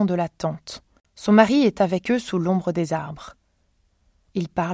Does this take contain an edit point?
no; 0 cuts

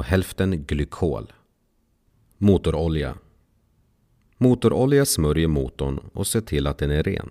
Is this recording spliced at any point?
no; 0 cuts

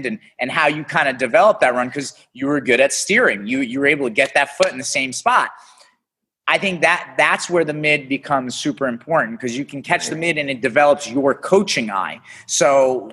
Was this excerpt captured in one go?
yes; 0 cuts

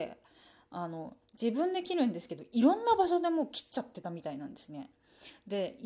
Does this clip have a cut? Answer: no; 0 cuts

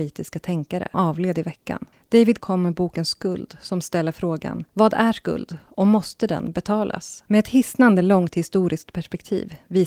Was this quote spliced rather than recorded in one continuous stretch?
yes; 3 cuts; at 0.9 s, 2.4 s, 4.7 s

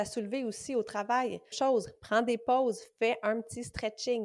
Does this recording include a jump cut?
yes; 1 cut; at 1.5 s

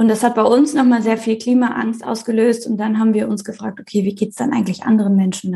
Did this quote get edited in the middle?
no; 0 cuts

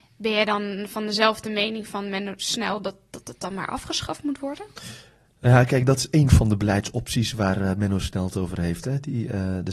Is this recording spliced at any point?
no; 0 cuts

